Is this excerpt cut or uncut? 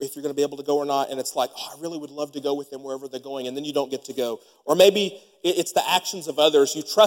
uncut